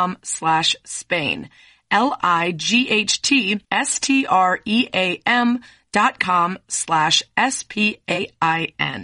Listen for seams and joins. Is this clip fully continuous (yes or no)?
no